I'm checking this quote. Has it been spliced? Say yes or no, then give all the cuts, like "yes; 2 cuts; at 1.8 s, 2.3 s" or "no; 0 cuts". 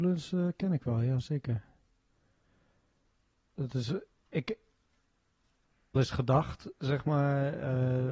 yes; 1 cut; at 6.0 s